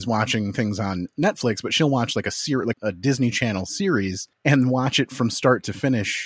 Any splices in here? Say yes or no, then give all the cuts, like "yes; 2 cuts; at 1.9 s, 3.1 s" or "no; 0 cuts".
yes; 2 cuts; at 2.7 s, 4.3 s